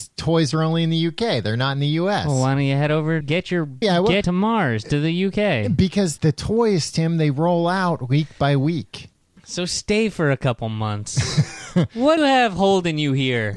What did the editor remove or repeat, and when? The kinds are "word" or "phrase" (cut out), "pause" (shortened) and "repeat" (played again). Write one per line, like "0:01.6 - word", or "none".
0:03.2 - word
0:03.8 - word
0:04.2 - phrase
0:06.2 - word
0:09.2 - pause
0:12.2 - word